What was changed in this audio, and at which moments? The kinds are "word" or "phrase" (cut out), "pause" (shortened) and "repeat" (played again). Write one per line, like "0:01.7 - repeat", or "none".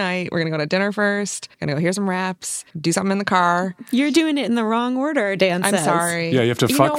0:01.5 - pause
0:02.7 - pause